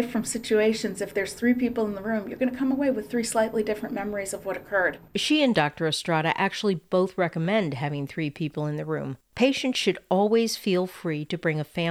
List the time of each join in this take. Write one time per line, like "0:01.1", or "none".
0:05.1
0:09.2